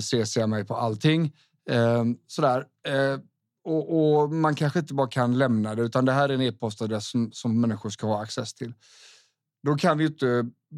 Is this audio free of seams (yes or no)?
yes